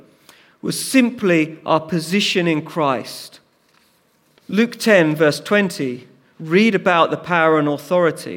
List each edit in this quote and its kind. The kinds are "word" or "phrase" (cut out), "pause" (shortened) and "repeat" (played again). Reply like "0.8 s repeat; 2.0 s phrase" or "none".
none